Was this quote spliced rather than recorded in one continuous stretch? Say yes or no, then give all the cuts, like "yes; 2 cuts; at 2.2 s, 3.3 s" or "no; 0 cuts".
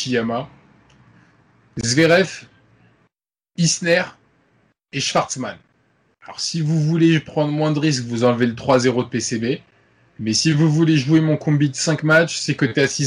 no; 0 cuts